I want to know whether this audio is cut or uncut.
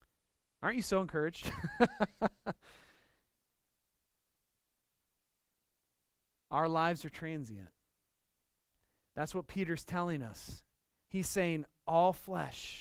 uncut